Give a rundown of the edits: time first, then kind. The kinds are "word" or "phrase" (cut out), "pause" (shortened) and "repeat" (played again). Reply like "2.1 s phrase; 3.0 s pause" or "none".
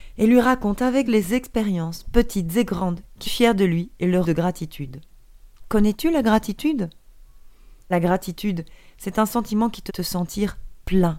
1.1 s phrase; 3.2 s phrase; 4.2 s word; 7.9 s word; 9.9 s word